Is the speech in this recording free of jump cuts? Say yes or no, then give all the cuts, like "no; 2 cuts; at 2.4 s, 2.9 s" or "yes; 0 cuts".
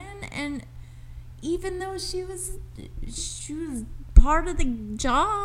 yes; 0 cuts